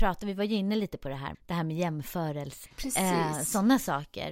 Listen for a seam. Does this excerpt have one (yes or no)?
yes